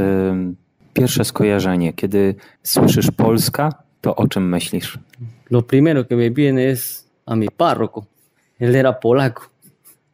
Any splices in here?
no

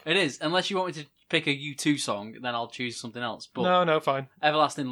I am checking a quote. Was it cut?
no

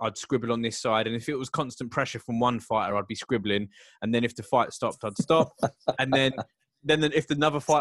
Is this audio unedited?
yes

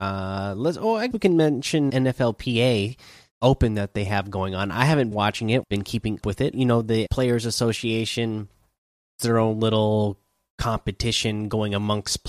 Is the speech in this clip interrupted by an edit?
yes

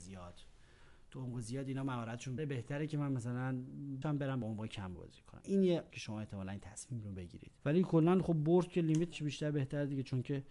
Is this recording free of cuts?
no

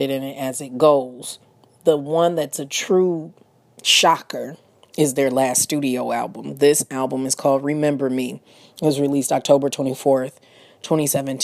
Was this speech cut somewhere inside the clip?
no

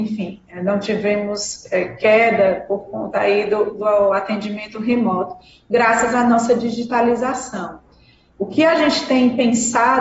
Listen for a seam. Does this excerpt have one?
no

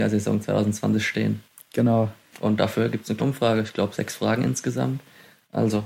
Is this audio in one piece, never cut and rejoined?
no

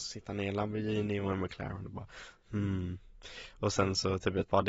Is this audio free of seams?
yes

